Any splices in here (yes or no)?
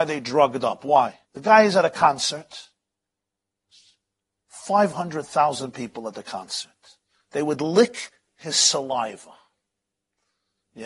yes